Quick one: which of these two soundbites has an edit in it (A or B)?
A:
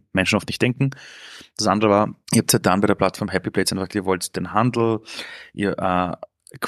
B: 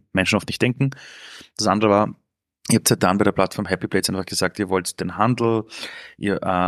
A